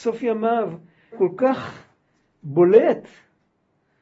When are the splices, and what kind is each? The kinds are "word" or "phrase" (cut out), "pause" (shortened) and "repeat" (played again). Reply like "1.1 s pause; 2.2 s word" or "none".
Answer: 1.1 s phrase